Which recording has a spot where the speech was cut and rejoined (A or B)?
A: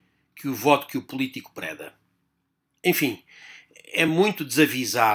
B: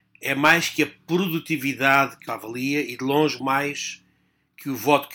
B